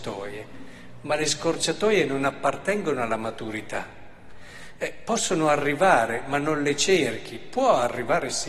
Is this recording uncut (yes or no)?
yes